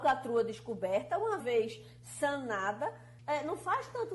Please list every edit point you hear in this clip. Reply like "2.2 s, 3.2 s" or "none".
1.4 s, 3.2 s